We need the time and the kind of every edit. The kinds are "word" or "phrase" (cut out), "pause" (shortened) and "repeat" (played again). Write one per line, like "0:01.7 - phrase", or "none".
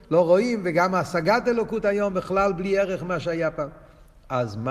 none